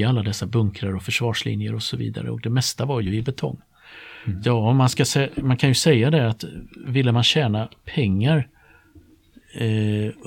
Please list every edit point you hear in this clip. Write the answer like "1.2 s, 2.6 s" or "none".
none